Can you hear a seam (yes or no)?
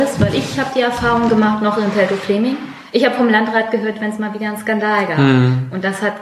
no